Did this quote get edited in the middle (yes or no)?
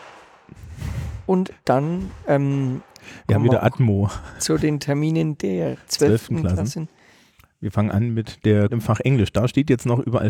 yes